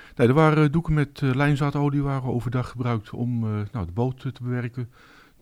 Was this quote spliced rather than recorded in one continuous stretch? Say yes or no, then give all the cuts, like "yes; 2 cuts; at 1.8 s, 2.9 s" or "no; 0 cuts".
no; 0 cuts